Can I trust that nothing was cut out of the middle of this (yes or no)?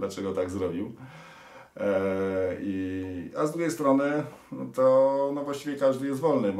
yes